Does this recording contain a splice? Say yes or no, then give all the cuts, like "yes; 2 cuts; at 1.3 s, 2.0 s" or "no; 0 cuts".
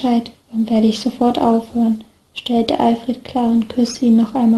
no; 0 cuts